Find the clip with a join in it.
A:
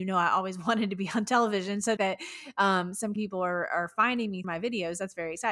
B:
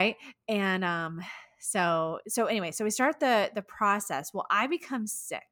A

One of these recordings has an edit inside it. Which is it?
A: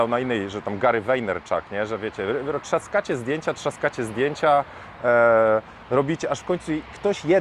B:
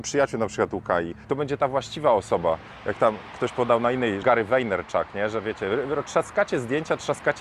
B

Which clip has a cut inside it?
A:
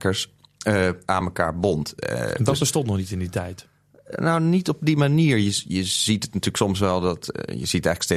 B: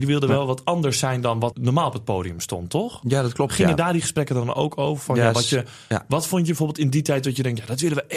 B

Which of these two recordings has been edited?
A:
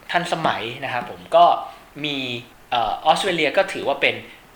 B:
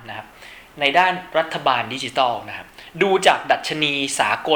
A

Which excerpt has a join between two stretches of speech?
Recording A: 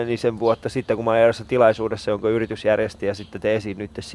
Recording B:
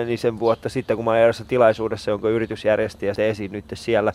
B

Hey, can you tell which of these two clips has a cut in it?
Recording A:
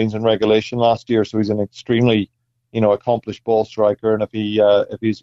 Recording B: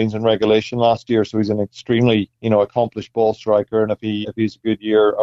B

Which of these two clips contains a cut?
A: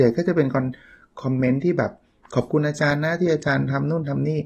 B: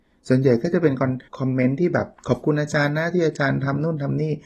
B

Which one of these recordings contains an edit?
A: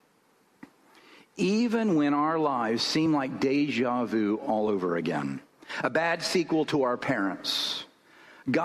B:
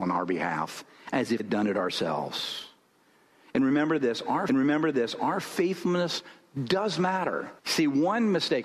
B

